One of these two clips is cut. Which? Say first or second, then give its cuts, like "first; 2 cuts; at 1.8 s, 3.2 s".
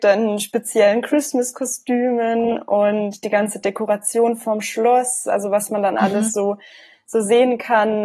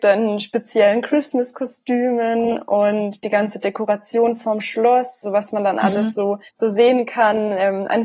second; 2 cuts; at 5.2 s, 6.5 s